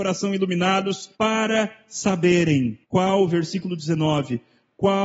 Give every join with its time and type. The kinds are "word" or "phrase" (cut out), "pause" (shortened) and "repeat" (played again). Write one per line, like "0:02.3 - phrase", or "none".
0:01.1 - pause
0:02.8 - pause